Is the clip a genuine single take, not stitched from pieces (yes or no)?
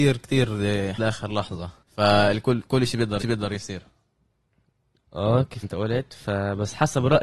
no